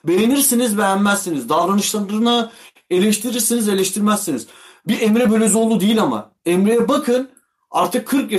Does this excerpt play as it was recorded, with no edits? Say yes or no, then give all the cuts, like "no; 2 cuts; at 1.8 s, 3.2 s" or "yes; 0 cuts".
yes; 0 cuts